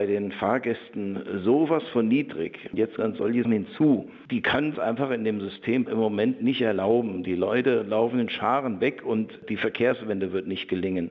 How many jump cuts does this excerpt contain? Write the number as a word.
four